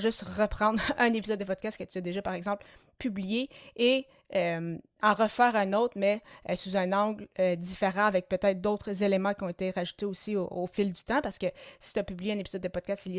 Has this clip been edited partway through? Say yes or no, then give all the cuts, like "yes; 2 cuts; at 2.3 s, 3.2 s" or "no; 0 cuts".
no; 0 cuts